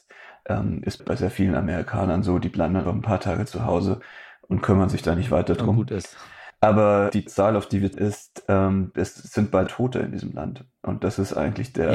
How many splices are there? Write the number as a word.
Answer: five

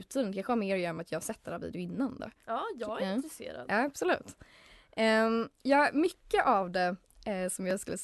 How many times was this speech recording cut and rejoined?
two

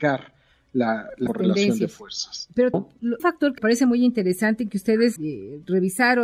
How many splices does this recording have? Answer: five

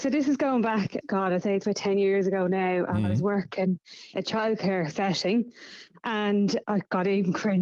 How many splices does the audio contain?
three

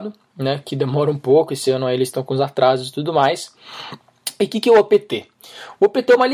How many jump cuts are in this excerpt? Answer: zero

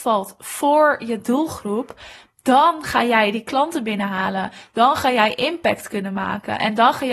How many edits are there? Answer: zero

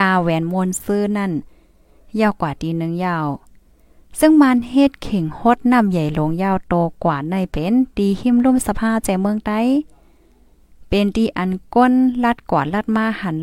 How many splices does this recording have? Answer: zero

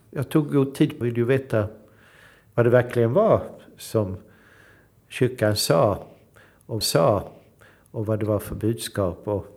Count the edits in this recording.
two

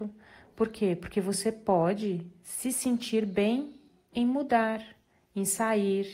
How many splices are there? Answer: zero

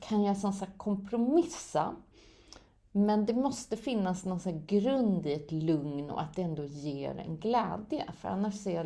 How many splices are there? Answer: zero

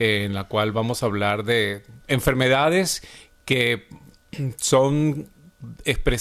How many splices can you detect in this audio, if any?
one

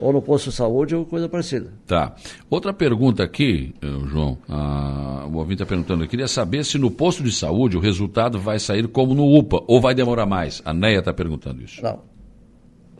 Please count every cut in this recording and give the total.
one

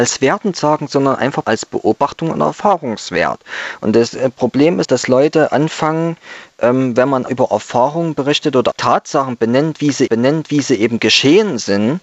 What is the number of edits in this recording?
five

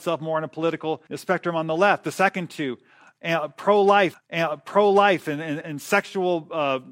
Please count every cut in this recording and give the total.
three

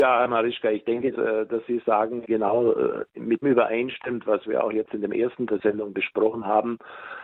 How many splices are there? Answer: five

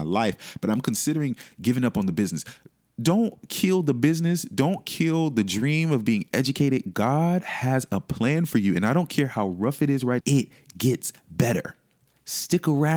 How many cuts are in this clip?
one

